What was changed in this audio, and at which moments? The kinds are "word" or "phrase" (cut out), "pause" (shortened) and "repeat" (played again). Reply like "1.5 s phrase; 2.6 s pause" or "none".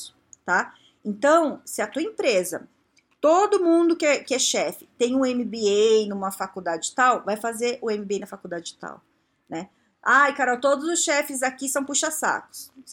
none